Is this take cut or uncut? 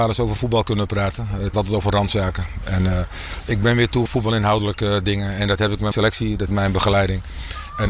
cut